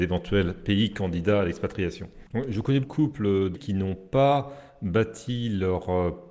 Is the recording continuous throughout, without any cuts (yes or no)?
no